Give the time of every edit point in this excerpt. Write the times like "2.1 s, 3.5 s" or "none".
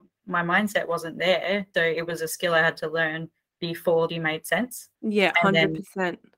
1.7 s, 4.1 s, 4.9 s